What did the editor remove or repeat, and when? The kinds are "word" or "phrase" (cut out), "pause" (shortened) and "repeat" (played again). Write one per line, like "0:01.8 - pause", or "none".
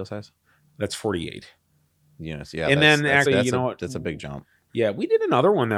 0:03.3 - word